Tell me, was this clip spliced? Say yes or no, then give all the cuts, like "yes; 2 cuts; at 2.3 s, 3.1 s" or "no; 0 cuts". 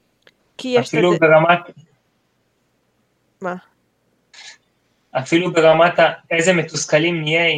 no; 0 cuts